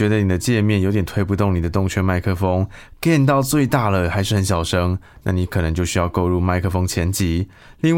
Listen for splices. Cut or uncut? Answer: uncut